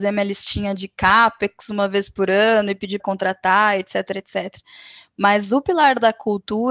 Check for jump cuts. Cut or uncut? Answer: cut